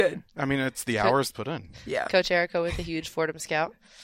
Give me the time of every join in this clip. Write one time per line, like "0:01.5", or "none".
0:01.3